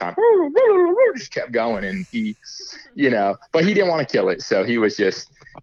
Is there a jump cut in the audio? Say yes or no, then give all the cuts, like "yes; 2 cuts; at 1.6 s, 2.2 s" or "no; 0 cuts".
no; 0 cuts